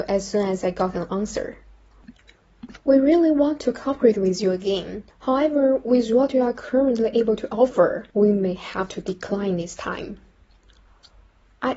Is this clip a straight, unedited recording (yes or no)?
no